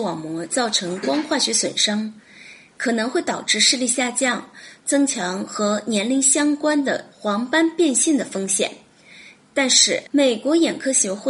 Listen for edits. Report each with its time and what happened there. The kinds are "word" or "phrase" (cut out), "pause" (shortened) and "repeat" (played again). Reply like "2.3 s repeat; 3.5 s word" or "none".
10.1 s pause